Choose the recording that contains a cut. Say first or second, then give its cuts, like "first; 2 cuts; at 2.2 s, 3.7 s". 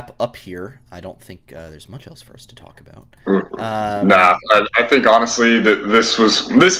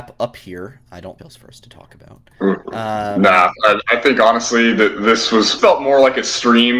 second; 2 cuts; at 1.2 s, 5.6 s